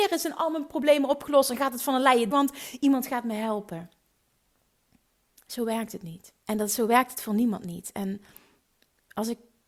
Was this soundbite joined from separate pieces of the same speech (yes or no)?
yes